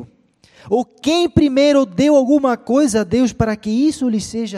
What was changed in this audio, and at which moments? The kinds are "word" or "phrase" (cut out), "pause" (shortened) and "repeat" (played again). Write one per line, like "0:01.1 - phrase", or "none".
none